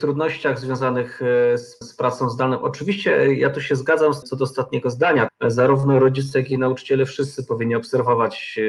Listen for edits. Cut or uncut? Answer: cut